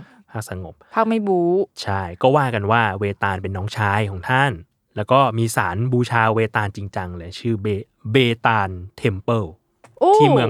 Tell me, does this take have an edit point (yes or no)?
no